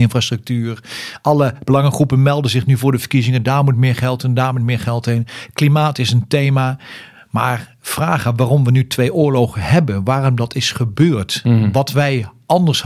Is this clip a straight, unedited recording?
yes; 0 cuts

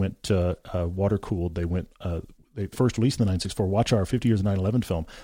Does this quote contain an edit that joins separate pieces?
yes; 1 cut; at 2.7 s

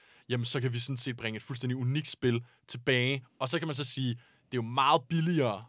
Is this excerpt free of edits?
yes; 0 cuts

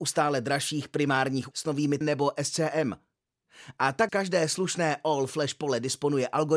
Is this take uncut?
no; 3 cuts; at 1.5 s, 2.0 s, 4.1 s

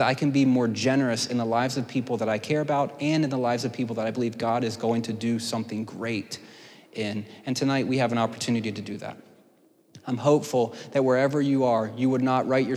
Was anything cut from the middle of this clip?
no; 0 cuts

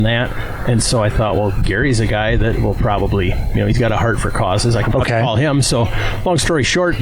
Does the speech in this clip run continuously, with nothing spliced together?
yes; 0 cuts

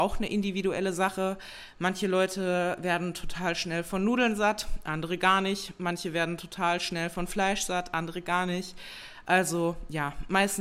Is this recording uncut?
yes; 0 cuts

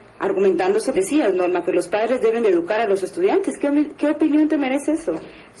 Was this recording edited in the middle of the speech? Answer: yes; 1 cut; at 1.0 s

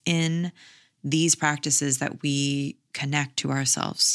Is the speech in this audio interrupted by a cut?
yes; 1 cut; at 2.8 s

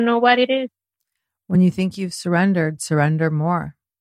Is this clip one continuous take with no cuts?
yes; 0 cuts

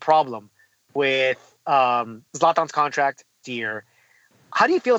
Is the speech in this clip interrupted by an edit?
yes; 2 cuts; at 2.3 s, 3.4 s

